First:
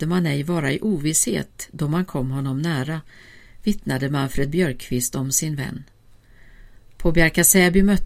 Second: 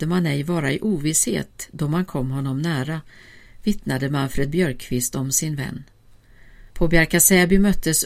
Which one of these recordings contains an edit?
second; 1 cut; at 6.7 s

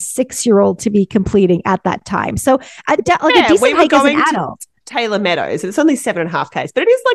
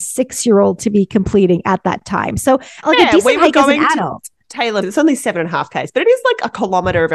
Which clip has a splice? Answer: second; 2 cuts; at 2.8 s, 4.8 s

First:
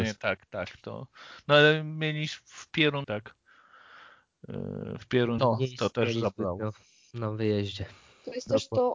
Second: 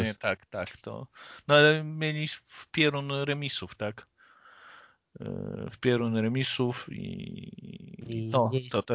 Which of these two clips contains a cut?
first; 2 cuts; at 3.0 s, 5.4 s

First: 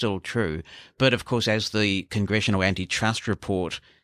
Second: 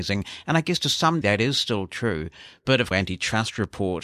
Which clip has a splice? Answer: second; 2 cuts; at 1.2 s, 2.9 s

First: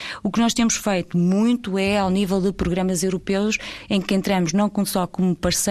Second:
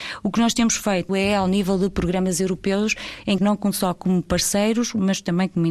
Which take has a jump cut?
second; 2 cuts; at 1.1 s, 3.4 s

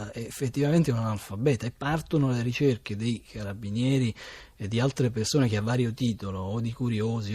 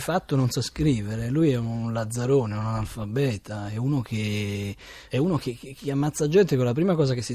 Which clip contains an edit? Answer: second; 1 cut; at 5.1 s

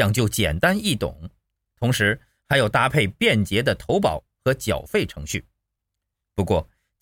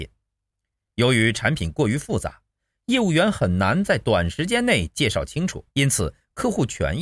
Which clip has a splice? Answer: second; 1 cut; at 5.7 s

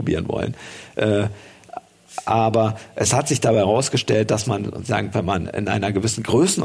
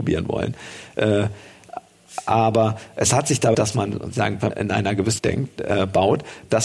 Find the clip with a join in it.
second; 3 cuts; at 3.5 s, 4.5 s, 5.2 s

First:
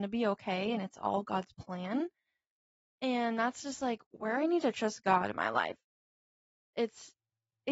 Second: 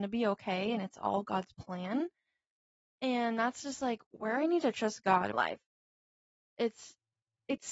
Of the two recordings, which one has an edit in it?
second; 1 cut; at 5.3 s

